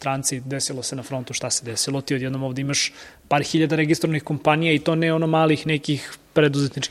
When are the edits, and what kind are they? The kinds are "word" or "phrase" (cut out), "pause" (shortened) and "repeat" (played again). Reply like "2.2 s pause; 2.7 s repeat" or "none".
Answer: 3.0 s pause